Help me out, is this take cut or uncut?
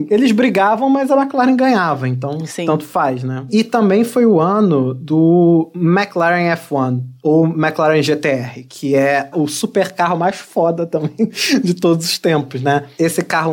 uncut